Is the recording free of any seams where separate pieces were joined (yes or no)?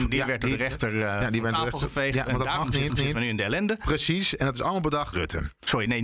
no